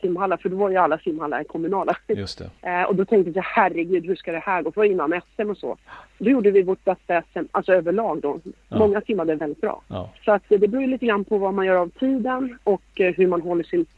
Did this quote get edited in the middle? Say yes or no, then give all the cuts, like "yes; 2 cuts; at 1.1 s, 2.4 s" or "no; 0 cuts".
yes; 3 cuts; at 4.8 s, 9.4 s, 10.2 s